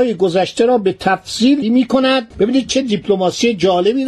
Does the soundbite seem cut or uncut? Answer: cut